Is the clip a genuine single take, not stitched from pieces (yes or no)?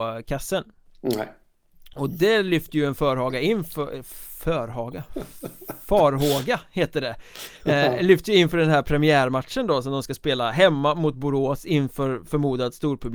yes